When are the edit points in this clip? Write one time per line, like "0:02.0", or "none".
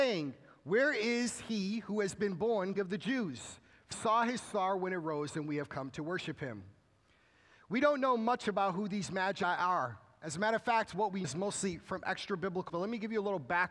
0:02.8
0:03.9
0:11.2
0:12.7